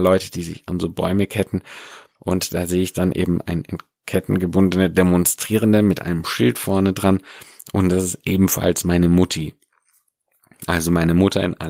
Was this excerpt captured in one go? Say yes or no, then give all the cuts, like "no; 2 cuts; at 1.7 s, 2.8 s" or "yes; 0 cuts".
yes; 0 cuts